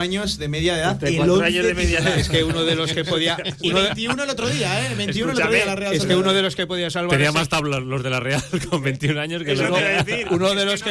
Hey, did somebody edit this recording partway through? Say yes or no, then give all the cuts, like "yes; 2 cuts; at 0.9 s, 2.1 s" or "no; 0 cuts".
no; 0 cuts